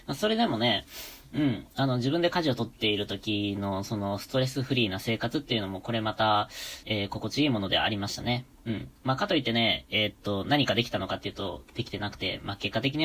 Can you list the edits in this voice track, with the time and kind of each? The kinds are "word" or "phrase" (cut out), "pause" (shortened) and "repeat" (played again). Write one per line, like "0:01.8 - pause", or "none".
0:06.8 - word
0:08.5 - pause

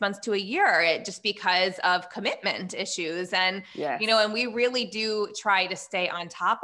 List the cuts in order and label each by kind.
none

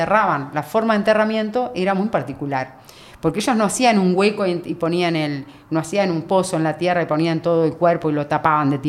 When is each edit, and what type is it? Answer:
none

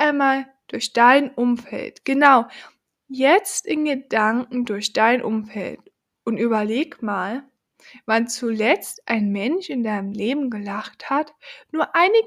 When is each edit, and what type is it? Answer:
none

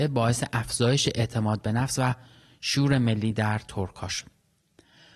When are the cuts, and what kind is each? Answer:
none

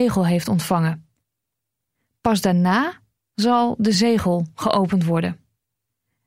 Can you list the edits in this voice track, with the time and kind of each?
0:03.9 - word

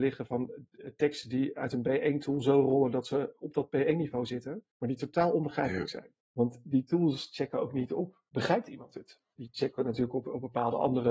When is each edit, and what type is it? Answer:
0:04.7 - pause
0:06.2 - pause
0:08.3 - pause

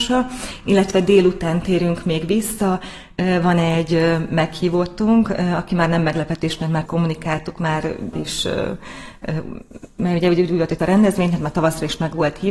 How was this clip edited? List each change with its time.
0:06.9 - word
0:08.1 - word
0:10.8 - phrase

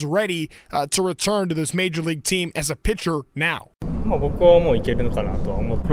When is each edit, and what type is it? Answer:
none

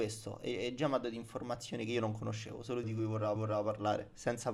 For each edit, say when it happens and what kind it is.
0:02.8 - phrase
0:03.4 - repeat

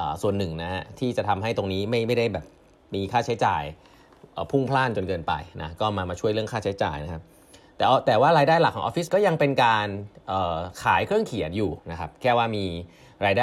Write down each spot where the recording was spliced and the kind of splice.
0:09.1 - word
0:11.8 - pause

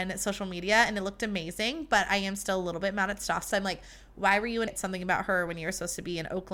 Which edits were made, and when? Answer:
0:03.5 - word
0:04.7 - word

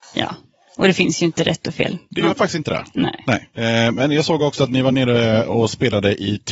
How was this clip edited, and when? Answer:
none

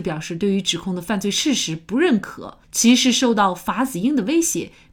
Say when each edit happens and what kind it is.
0:02.6 - pause

